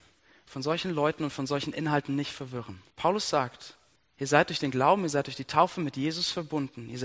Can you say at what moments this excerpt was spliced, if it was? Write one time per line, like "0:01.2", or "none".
0:02.9
0:04.0